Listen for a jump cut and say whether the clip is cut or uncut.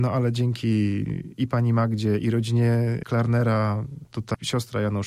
uncut